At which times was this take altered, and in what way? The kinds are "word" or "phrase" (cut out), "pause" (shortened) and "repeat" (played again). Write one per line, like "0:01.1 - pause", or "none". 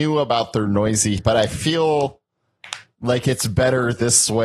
0:01.2 - word